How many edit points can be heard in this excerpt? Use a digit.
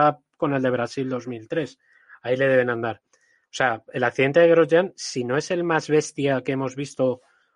0